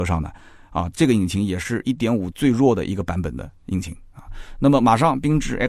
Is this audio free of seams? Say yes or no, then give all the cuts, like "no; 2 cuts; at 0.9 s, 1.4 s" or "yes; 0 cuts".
no; 1 cut; at 2.3 s